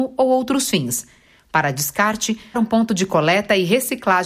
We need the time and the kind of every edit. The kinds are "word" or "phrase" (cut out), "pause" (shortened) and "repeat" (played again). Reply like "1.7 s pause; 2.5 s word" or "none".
2.5 s word